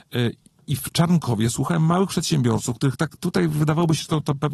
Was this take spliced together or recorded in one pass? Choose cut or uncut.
uncut